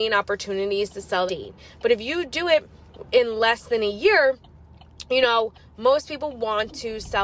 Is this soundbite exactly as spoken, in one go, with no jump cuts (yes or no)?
no